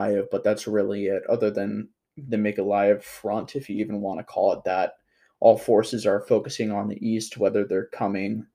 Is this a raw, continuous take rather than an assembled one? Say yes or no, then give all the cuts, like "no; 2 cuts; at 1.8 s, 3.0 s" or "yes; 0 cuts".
yes; 0 cuts